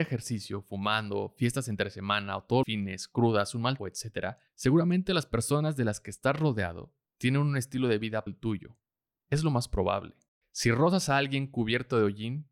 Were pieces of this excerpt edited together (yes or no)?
yes